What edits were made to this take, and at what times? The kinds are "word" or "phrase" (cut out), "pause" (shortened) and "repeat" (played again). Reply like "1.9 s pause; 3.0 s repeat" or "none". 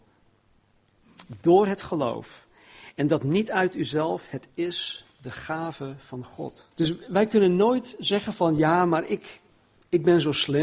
6.7 s pause